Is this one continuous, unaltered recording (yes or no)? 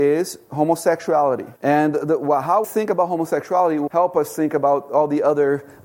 no